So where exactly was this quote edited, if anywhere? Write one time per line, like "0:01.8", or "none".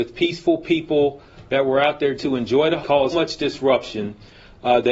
0:02.1
0:02.8
0:03.1